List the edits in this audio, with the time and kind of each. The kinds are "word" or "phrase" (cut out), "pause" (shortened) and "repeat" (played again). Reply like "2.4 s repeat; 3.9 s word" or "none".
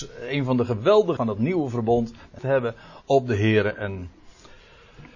1.2 s word; 2.4 s phrase